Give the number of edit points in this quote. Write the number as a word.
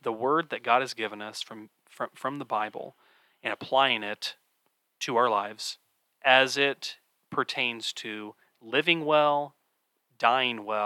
zero